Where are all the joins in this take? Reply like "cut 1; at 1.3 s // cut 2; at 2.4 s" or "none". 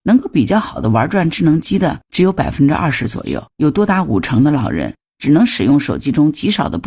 cut 1; at 3.5 s